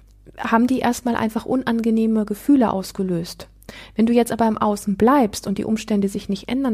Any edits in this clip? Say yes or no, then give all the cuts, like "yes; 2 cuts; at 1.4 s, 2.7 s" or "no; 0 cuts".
no; 0 cuts